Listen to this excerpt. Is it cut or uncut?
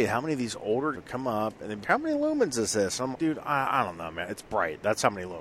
cut